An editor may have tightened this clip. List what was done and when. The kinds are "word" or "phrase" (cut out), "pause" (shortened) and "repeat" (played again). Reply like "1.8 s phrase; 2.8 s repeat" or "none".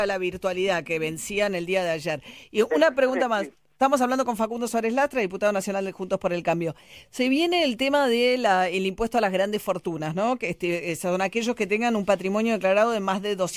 none